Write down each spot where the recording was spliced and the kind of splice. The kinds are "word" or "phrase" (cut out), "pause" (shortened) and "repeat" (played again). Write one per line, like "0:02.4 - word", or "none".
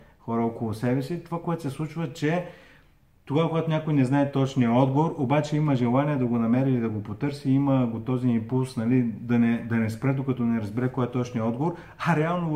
none

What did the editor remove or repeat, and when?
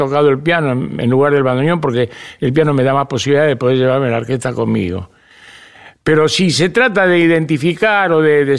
none

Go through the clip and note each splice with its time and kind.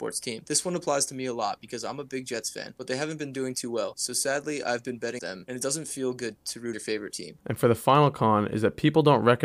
0:05.2 - word
0:06.7 - word

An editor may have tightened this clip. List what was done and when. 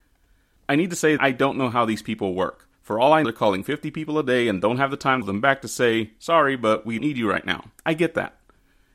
0:01.2 - word
0:02.7 - pause
0:03.2 - word
0:05.2 - phrase
0:07.0 - word
0:07.8 - pause

